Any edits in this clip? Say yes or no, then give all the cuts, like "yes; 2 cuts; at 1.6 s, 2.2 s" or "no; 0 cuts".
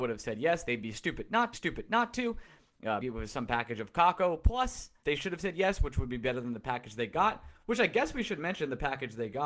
yes; 3 cuts; at 1.5 s, 3.0 s, 5.0 s